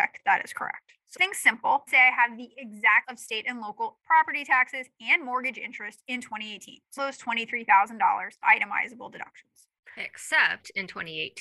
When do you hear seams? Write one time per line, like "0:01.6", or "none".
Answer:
0:01.2
0:01.9
0:03.0
0:04.0
0:07.0
0:08.4